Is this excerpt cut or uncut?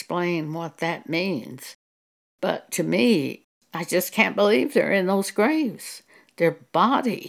uncut